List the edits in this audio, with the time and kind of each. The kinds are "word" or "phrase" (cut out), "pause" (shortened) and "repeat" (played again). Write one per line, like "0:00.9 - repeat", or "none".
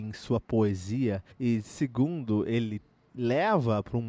0:01.3 - pause
0:03.1 - word